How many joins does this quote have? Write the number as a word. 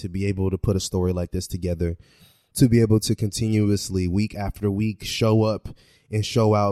zero